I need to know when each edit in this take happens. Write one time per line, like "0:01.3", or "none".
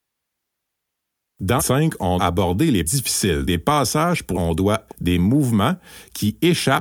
0:01.6
0:02.2
0:02.8
0:03.5
0:04.3
0:04.9